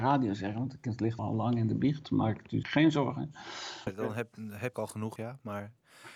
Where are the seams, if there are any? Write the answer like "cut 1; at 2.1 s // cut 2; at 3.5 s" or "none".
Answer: cut 1; at 1.2 s // cut 2; at 2.6 s // cut 3; at 3.9 s // cut 4; at 4.7 s // cut 5; at 5.2 s